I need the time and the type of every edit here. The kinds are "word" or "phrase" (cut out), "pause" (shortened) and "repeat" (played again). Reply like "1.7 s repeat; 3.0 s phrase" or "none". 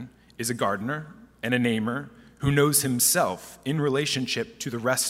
none